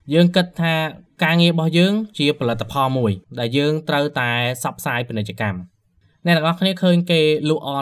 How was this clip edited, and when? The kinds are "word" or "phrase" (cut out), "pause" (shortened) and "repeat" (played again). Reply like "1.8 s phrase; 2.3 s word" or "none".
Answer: none